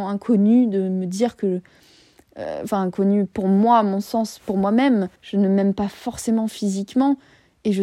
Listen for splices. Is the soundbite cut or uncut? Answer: cut